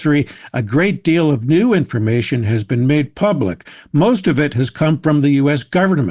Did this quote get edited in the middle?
no; 0 cuts

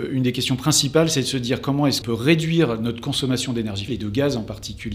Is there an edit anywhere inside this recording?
yes; 2 cuts; at 2.0 s, 3.9 s

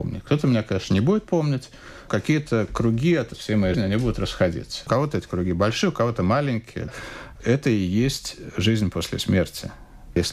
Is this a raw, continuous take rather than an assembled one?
no; 2 cuts; at 2.1 s, 3.7 s

